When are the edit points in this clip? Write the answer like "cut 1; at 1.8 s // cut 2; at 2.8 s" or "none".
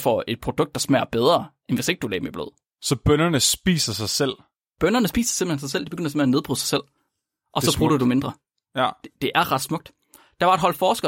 none